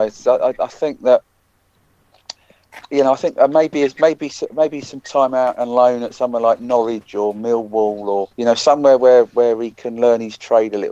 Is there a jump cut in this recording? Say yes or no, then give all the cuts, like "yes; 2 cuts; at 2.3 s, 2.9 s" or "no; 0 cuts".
yes; 1 cut; at 8.3 s